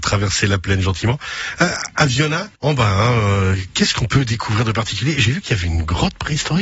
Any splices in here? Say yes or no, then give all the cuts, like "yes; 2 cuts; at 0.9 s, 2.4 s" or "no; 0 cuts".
yes; 1 cut; at 2.6 s